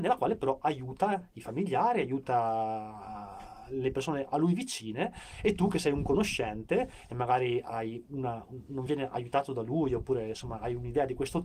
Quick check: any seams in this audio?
no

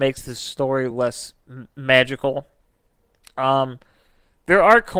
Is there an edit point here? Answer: no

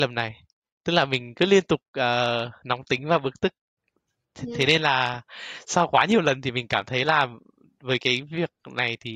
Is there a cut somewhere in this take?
yes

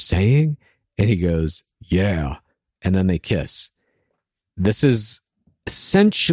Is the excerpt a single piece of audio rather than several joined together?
yes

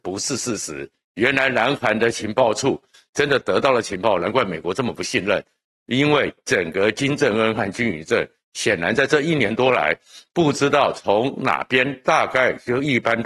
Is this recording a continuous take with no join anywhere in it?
yes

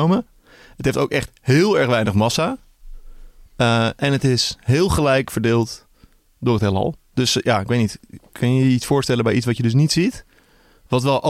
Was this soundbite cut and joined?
no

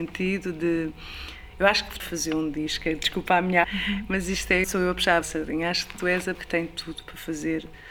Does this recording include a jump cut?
yes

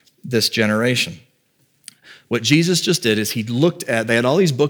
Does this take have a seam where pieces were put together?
no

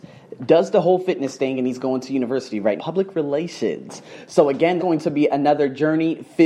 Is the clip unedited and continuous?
no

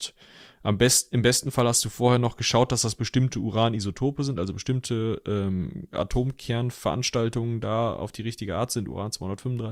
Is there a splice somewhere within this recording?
no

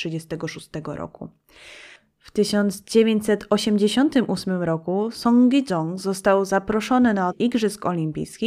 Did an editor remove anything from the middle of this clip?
yes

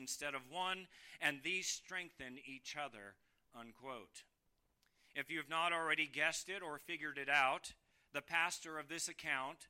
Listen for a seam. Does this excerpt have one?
no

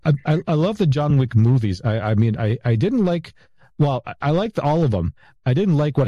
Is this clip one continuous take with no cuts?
yes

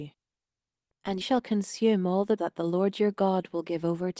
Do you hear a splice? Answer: yes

